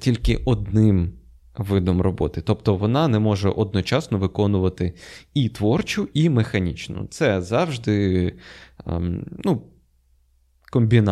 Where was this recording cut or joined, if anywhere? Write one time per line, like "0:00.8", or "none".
none